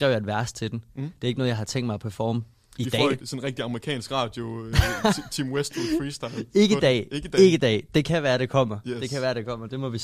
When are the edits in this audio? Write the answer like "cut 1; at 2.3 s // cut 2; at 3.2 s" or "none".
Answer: cut 1; at 3.2 s